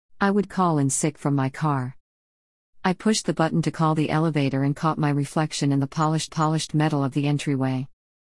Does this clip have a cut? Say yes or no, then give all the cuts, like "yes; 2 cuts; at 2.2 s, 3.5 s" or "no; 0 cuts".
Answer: yes; 1 cut; at 6.3 s